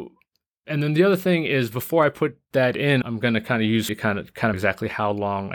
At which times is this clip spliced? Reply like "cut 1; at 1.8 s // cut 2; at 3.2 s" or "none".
cut 1; at 3.0 s // cut 2; at 3.9 s // cut 3; at 4.5 s